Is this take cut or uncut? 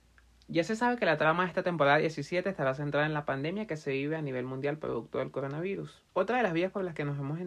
cut